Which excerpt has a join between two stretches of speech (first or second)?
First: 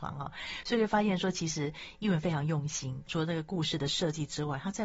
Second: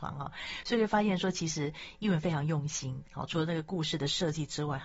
first